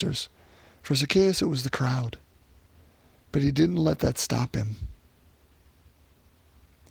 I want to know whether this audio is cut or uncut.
uncut